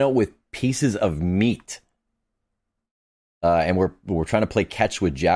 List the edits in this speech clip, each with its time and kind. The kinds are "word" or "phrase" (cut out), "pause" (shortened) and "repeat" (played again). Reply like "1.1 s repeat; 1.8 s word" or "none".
none